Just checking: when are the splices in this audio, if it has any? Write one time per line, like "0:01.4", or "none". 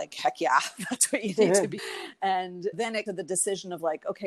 0:01.8
0:02.7
0:03.1

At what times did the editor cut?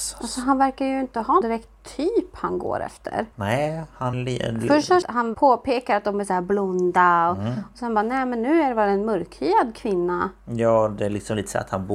0:01.4
0:03.3
0:04.1
0:05.0
0:05.3

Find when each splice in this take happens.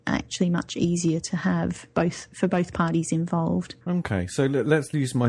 0:03.8

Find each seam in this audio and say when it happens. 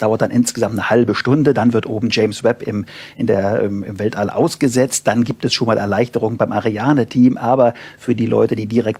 none

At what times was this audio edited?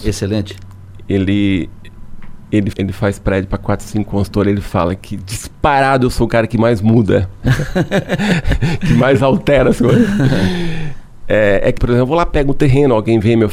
0:02.7
0:11.8

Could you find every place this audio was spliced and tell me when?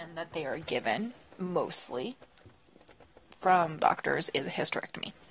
0:03.8

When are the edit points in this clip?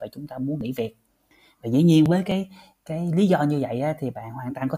none

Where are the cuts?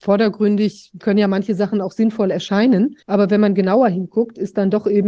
0:03.0

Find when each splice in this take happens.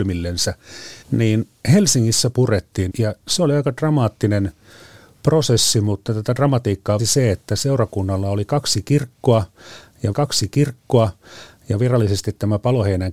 0:01.0
0:02.3
0:02.9
0:07.0
0:10.1

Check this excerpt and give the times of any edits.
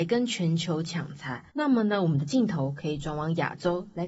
0:01.5

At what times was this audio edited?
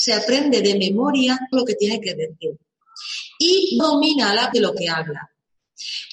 0:01.5
0:03.8
0:04.5

